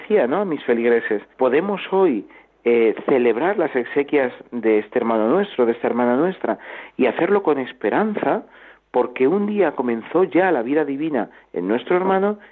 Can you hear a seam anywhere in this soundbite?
yes; 1 cut; at 1.3 s

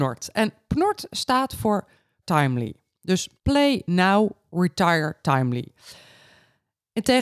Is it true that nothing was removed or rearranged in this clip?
no; 2 cuts; at 2.2 s, 3.4 s

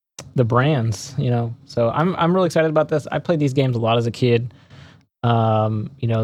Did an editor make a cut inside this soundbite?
no; 0 cuts

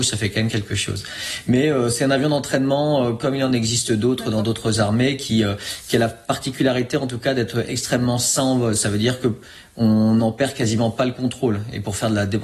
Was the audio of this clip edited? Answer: no; 0 cuts

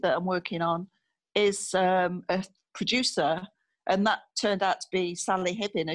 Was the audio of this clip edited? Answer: no; 0 cuts

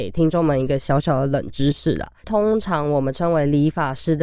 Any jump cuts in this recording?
yes; 1 cut; at 2.2 s

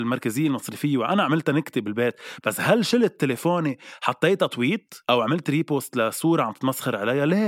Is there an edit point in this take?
yes; 1 cut; at 5.0 s

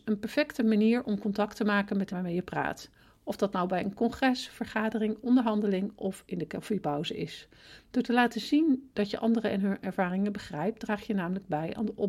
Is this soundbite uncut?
no; 1 cut; at 2.1 s

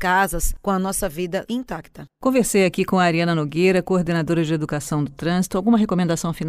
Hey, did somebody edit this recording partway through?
yes; 1 cut; at 1.5 s

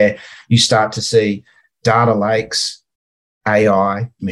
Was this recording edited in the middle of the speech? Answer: no; 0 cuts

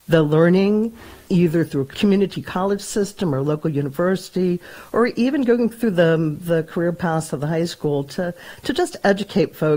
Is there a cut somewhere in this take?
no; 0 cuts

